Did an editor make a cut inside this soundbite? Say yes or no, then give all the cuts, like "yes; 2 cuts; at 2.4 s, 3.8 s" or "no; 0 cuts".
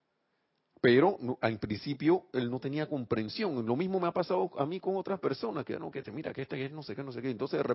no; 0 cuts